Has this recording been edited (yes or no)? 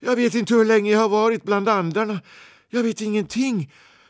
no